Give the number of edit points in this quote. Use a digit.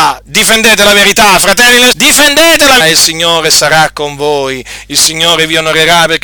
2